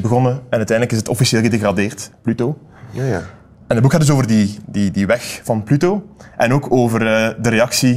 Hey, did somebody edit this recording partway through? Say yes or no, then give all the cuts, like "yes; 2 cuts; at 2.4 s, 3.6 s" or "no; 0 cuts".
no; 0 cuts